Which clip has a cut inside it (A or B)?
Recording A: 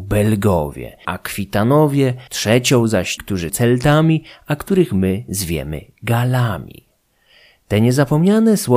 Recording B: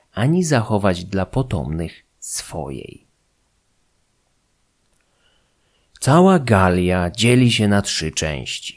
A